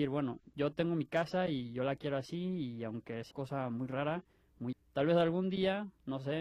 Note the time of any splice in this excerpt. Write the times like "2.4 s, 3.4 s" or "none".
3.3 s, 4.7 s